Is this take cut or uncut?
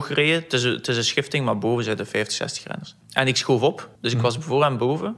cut